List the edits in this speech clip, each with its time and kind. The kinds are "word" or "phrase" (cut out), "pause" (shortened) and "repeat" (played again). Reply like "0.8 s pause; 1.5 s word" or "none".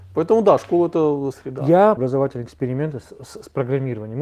1.3 s word; 2.0 s phrase